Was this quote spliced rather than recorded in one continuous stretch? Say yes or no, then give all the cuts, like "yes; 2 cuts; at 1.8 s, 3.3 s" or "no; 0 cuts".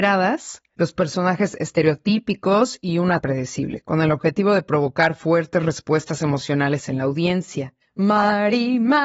yes; 1 cut; at 3.2 s